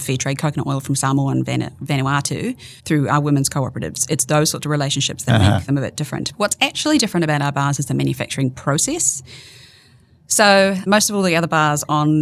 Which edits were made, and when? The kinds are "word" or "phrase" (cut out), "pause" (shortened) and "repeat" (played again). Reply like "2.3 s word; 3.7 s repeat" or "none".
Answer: 2.8 s pause; 10.9 s word